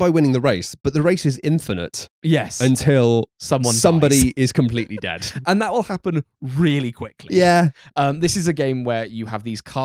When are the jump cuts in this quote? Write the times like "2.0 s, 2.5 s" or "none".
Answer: none